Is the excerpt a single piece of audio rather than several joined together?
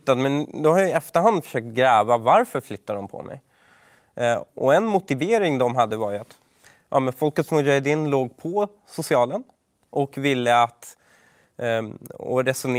yes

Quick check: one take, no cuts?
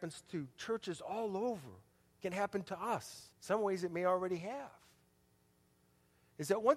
no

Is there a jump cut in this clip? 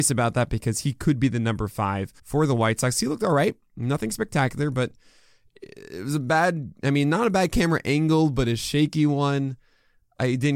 yes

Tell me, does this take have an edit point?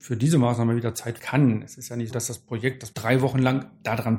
yes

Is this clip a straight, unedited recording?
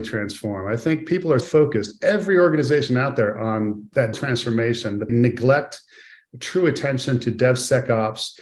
no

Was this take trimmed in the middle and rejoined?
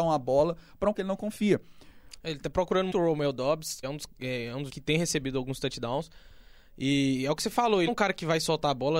yes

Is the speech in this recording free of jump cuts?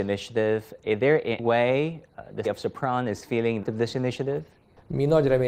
no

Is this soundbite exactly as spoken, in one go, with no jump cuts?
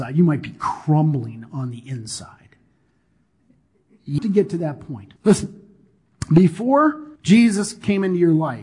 no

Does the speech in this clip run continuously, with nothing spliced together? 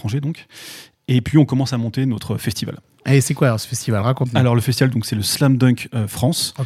yes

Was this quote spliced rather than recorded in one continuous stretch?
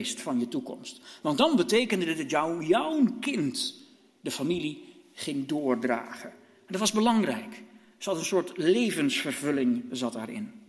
no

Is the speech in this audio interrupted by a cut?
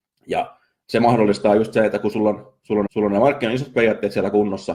yes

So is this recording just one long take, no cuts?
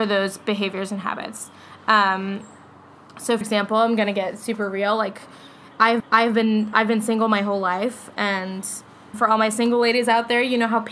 no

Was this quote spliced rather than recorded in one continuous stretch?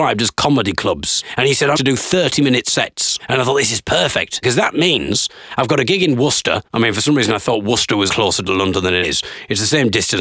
yes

